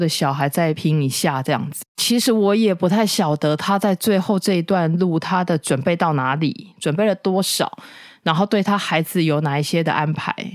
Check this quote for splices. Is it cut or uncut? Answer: cut